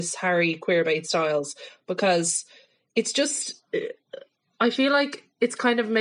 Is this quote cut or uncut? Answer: uncut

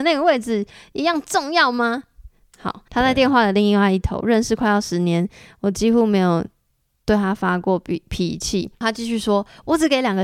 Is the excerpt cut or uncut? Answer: cut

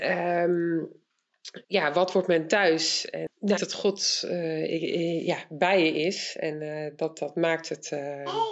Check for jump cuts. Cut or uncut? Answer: cut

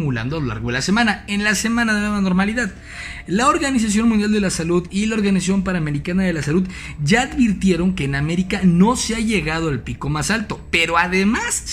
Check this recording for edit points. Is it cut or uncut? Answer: uncut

